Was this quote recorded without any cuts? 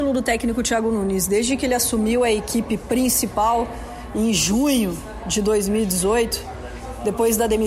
yes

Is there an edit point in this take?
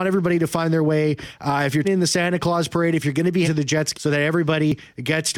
yes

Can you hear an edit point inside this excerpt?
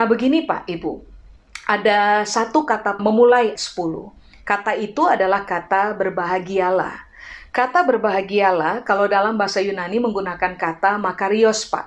yes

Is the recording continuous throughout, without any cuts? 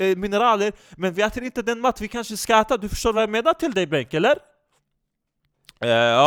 yes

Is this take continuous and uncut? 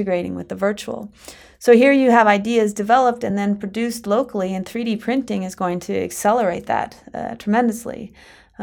yes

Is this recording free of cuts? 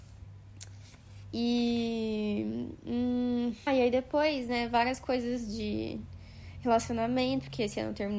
no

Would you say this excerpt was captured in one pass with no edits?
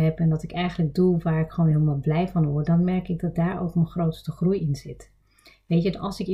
yes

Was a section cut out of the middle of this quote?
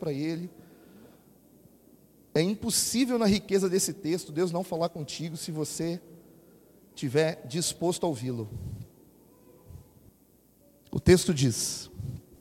no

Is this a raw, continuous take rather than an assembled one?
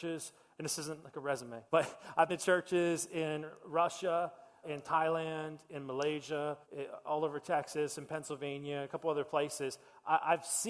no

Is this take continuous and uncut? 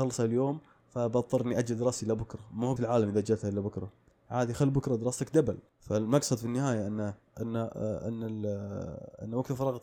no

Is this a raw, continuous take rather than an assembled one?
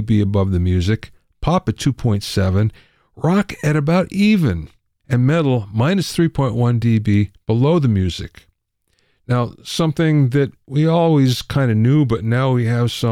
yes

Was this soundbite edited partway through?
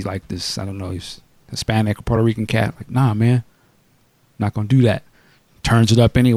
no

